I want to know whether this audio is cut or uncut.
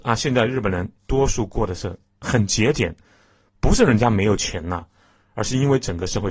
uncut